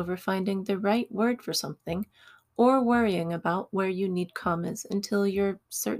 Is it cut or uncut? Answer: uncut